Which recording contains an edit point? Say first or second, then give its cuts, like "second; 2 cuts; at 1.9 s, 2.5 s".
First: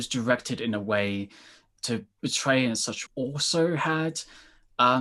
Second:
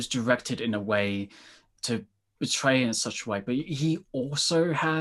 first; 2 cuts; at 2.1 s, 3.1 s